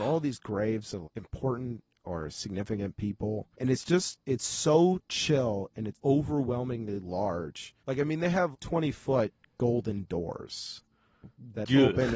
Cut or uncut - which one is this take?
cut